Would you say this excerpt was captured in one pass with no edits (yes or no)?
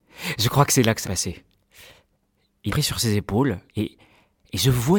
no